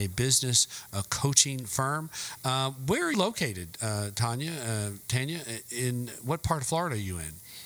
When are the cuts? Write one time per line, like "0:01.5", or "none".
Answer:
0:03.1